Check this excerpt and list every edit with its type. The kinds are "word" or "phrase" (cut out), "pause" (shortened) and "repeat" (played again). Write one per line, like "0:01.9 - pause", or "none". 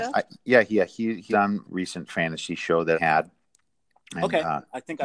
0:01.3 - word
0:01.6 - word
0:02.9 - word